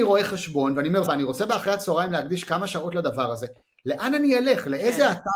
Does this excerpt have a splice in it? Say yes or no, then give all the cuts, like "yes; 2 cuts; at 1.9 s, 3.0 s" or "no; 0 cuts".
yes; 1 cut; at 1.1 s